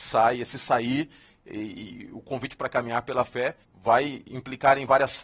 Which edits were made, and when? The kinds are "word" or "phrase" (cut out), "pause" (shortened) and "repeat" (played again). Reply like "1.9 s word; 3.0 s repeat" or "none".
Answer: 3.6 s pause